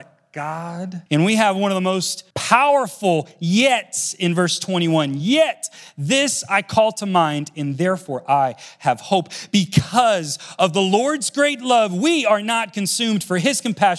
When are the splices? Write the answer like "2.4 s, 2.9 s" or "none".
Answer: 1.1 s, 2.3 s